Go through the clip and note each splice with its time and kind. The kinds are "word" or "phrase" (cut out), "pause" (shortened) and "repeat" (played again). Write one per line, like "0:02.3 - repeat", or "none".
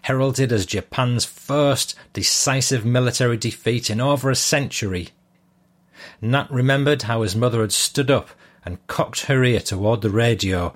none